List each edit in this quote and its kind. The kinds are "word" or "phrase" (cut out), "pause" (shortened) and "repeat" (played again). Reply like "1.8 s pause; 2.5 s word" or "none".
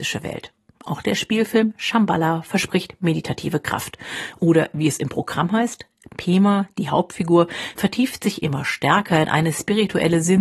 none

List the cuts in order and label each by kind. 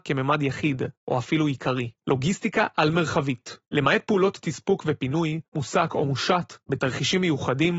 1.0 s pause; 2.0 s pause; 3.7 s pause; 5.5 s pause; 6.6 s pause

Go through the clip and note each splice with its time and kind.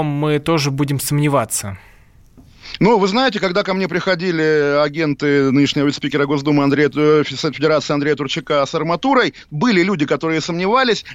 none

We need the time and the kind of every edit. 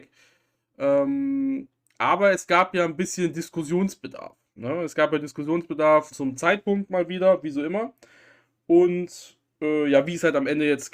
6.1 s word

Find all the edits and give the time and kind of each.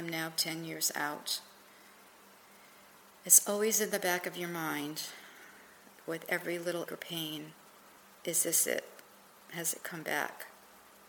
6.9 s word

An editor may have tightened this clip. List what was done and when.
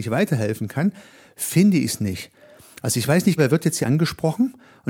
3.4 s word; 3.8 s word

